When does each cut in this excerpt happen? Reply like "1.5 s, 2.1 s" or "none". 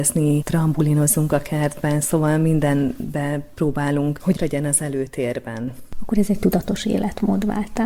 4.4 s